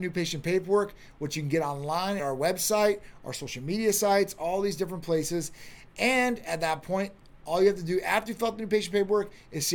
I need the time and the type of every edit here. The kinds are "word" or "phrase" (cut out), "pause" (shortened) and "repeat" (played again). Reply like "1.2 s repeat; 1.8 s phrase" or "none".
2.2 s word